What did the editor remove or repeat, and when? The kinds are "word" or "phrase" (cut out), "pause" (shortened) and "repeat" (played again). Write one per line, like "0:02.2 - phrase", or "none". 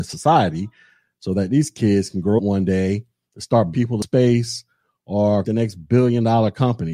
0:02.4 - word
0:03.7 - word
0:05.4 - word